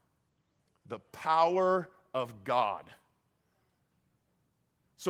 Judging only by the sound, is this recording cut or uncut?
uncut